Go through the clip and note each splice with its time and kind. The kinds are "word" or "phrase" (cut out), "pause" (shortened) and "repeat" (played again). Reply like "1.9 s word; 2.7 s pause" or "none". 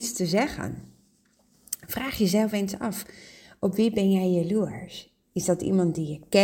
none